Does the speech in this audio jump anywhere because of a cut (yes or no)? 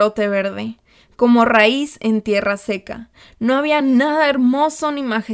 no